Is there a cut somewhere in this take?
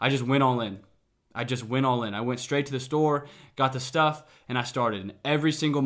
no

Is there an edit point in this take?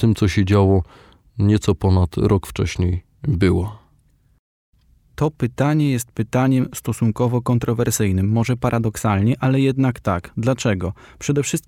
no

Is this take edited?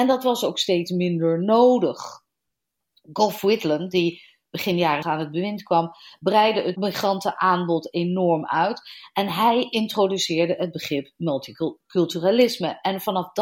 yes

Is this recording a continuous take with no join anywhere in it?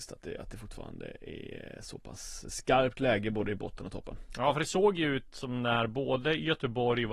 yes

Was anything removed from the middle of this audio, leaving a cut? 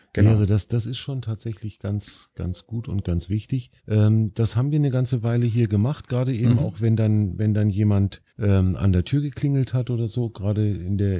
yes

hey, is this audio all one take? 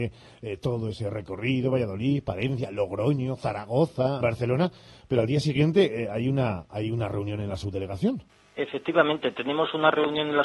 no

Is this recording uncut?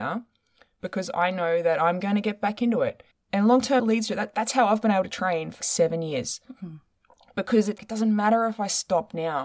no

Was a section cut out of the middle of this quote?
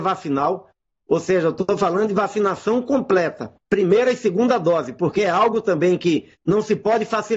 yes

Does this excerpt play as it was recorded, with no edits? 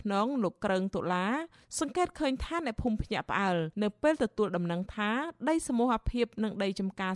no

